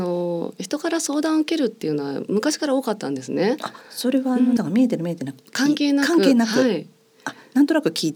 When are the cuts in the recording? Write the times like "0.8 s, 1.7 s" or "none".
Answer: 3.8 s, 4.6 s